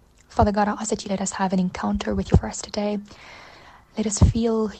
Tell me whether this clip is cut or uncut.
cut